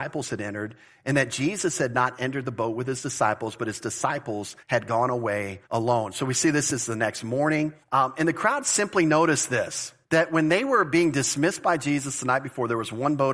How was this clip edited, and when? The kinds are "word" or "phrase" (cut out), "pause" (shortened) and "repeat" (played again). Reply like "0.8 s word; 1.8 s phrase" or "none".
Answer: 4.6 s pause; 5.7 s pause; 7.8 s pause; 10.0 s pause